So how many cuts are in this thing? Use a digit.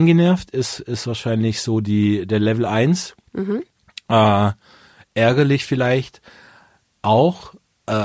0